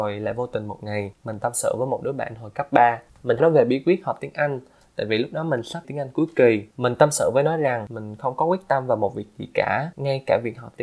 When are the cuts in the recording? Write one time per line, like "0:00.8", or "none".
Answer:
0:03.4
0:05.8

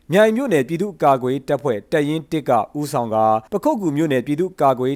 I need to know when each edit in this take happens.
0:03.5

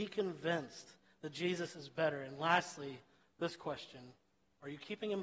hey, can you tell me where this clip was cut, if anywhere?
none

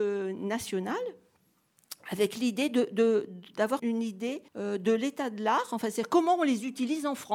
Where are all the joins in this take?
0:03.8
0:04.5

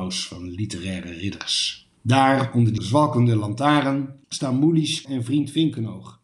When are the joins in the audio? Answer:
0:02.0
0:02.8
0:04.2
0:05.0

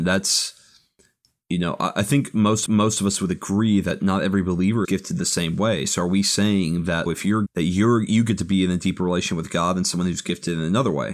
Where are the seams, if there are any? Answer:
0:02.7
0:04.8
0:07.1
0:07.5

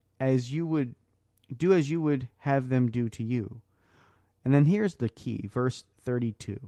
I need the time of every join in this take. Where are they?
none

